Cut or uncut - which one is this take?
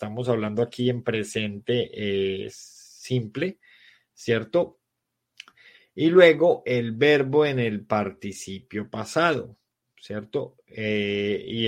uncut